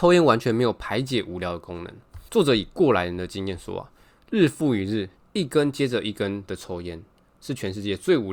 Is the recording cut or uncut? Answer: cut